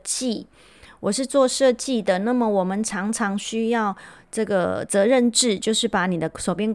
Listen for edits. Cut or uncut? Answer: uncut